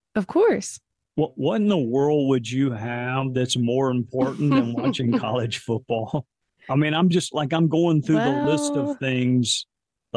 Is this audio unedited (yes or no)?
yes